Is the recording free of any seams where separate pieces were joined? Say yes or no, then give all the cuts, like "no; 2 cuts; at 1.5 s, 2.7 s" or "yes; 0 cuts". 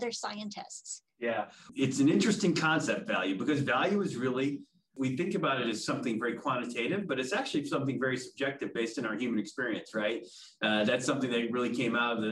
yes; 0 cuts